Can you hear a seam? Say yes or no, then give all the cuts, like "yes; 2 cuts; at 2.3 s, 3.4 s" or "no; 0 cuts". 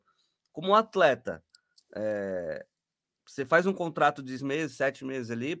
yes; 2 cuts; at 3.2 s, 4.4 s